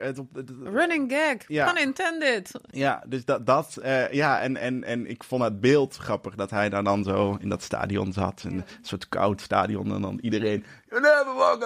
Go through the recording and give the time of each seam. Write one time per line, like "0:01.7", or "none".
none